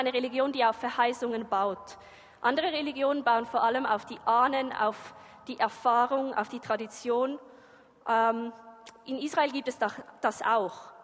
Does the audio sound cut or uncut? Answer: uncut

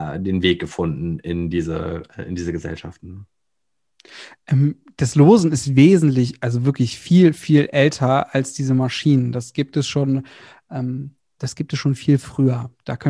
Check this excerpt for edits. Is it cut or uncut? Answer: uncut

